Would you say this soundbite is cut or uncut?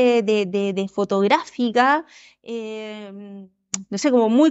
uncut